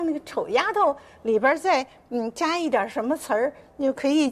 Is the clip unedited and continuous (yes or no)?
yes